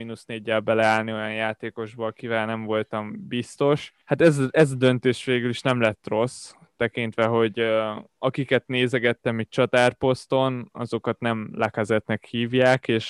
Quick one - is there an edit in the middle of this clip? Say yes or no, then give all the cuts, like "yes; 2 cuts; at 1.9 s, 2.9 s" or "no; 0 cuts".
yes; 2 cuts; at 4.0 s, 8.1 s